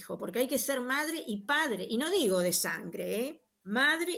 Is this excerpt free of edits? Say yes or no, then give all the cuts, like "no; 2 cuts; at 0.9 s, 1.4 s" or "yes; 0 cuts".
yes; 0 cuts